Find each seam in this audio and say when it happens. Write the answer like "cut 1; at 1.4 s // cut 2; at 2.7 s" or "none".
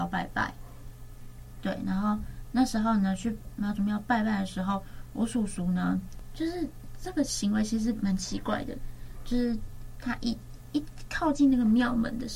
none